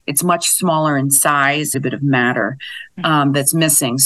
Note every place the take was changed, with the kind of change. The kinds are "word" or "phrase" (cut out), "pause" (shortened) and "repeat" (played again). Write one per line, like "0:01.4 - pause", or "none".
0:01.7 - phrase